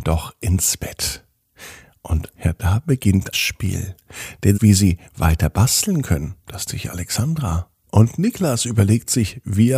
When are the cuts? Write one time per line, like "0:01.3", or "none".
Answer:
0:02.3
0:03.3
0:04.5
0:06.7